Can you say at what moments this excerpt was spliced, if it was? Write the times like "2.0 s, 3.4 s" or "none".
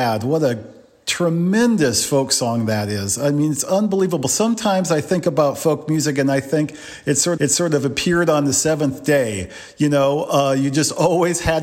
7.4 s